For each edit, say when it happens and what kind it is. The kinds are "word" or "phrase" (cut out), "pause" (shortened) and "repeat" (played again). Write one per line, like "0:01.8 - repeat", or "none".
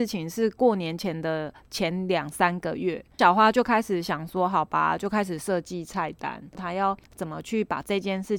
0:07.0 - pause